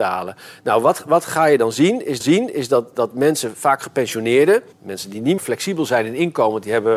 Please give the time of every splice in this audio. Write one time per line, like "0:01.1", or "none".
0:02.2
0:04.7
0:05.4